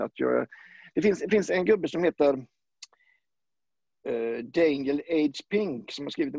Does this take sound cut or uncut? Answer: uncut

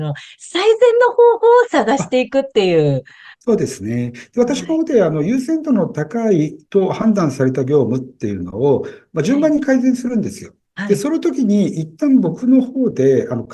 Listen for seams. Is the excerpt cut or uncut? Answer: cut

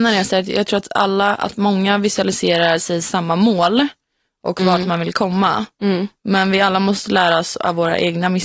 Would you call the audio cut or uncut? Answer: uncut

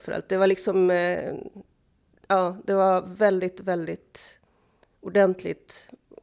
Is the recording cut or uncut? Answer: uncut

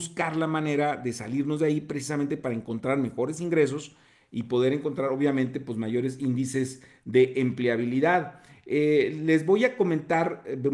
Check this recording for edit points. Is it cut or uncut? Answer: uncut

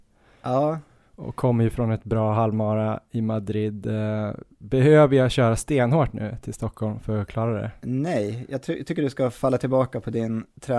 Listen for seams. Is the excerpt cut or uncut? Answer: uncut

